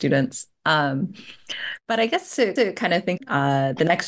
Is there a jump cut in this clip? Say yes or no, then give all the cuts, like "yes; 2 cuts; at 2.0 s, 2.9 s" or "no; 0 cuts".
yes; 2 cuts; at 2.6 s, 3.2 s